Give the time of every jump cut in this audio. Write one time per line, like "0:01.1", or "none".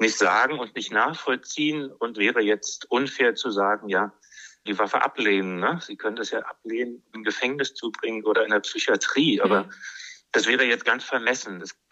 0:02.1
0:04.7
0:06.4
0:07.1